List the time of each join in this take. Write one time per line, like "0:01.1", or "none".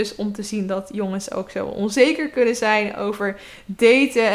none